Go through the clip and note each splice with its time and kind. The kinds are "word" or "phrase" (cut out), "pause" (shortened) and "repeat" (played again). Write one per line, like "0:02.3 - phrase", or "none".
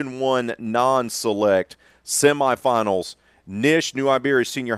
none